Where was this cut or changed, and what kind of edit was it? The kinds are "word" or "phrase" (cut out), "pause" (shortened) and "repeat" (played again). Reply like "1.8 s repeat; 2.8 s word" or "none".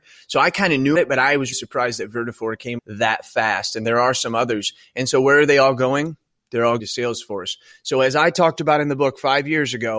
1.0 s word; 1.5 s word; 2.8 s word; 6.8 s word